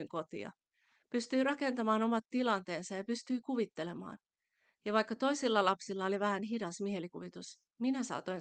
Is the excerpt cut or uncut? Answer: uncut